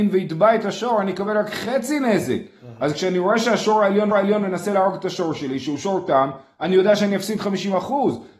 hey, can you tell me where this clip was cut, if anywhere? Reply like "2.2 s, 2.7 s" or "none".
4.1 s